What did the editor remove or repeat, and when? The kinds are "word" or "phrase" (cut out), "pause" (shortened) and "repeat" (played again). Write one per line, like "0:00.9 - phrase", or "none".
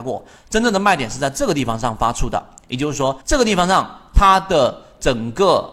0:03.2 - pause